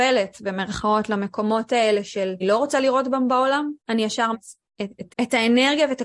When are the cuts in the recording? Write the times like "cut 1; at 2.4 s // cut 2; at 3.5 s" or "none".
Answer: cut 1; at 2.4 s // cut 2; at 3.8 s // cut 3; at 4.3 s // cut 4; at 5.1 s